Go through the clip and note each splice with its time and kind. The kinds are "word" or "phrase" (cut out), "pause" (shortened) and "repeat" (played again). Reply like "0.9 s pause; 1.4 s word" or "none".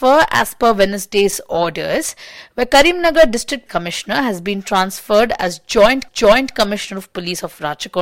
3.7 s word; 6.1 s repeat